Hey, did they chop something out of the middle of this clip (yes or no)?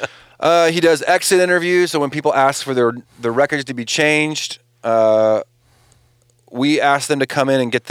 no